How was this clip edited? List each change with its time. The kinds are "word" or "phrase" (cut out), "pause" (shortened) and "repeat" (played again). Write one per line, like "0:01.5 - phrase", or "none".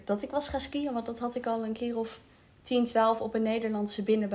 none

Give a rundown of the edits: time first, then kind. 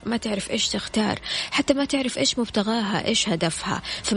none

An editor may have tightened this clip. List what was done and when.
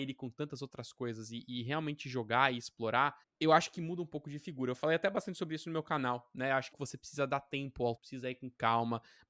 0:03.2 - pause
0:06.7 - phrase
0:08.0 - word

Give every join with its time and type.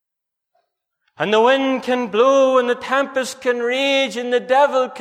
none

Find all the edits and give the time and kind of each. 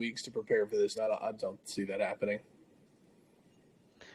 0:00.9 - word
0:01.4 - word

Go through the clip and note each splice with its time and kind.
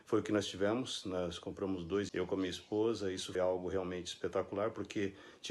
0:02.1 - word
0:03.3 - word

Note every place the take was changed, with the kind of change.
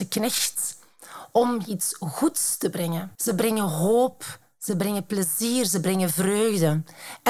0:03.1 - pause

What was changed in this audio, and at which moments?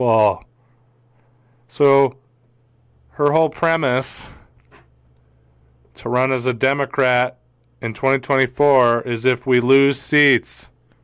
none

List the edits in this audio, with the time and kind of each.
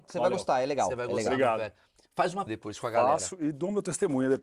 0:02.5 - word

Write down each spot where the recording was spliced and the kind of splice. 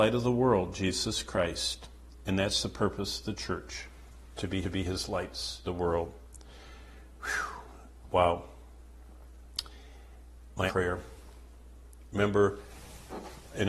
0:04.6 - repeat
0:05.6 - word
0:10.7 - word

